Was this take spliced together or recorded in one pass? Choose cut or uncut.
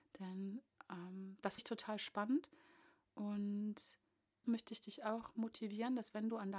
cut